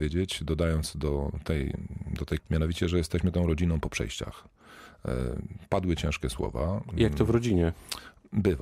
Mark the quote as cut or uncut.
cut